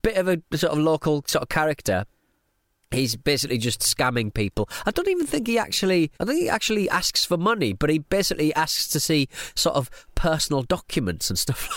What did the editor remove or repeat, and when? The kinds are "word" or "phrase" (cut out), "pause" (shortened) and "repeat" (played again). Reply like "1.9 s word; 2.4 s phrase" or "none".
6.1 s pause